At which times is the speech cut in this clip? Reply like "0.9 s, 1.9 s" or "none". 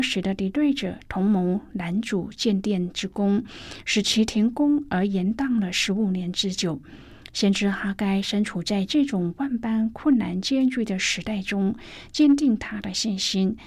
none